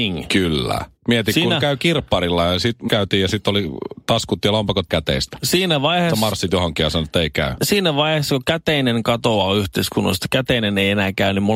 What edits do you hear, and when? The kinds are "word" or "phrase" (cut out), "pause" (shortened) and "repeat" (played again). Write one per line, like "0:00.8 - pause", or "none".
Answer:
0:01.0 - pause
0:02.9 - word
0:04.9 - word